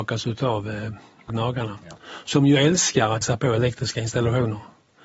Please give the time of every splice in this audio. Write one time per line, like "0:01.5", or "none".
0:01.3
0:03.2